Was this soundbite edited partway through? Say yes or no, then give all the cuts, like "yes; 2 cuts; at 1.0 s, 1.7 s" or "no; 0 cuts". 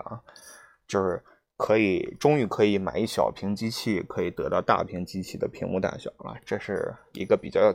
no; 0 cuts